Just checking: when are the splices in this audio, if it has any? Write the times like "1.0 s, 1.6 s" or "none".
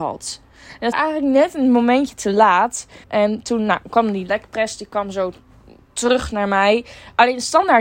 0.9 s, 3.0 s